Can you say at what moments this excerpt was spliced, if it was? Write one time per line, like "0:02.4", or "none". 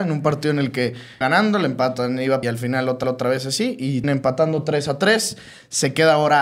0:01.2
0:02.4
0:03.0
0:04.0